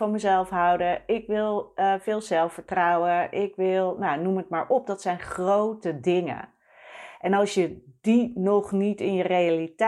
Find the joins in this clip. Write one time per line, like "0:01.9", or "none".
none